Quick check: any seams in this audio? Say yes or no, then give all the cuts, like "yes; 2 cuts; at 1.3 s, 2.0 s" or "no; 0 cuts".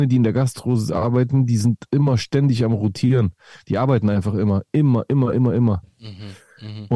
no; 0 cuts